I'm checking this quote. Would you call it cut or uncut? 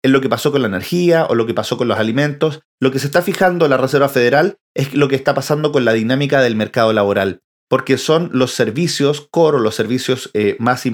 uncut